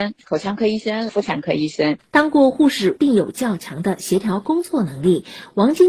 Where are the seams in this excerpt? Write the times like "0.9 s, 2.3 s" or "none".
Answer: 3.0 s